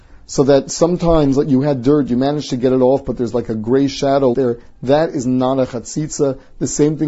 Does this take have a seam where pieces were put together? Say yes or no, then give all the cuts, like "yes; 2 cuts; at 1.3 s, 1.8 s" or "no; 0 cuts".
yes; 1 cut; at 4.3 s